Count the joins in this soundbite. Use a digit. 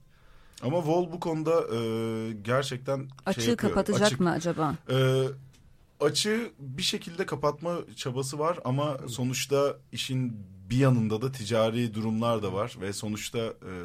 0